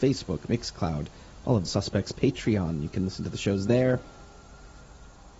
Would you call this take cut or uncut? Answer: cut